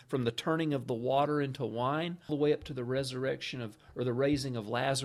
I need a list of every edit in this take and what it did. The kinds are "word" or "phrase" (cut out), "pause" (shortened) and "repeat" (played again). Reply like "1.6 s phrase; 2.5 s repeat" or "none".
2.3 s word